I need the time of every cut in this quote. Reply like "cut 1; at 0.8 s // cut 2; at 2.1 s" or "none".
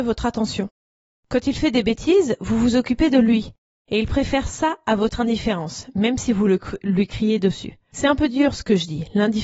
none